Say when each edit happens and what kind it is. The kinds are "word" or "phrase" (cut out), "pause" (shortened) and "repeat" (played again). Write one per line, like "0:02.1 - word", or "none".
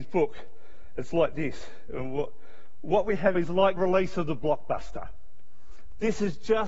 0:03.3 - word
0:03.8 - phrase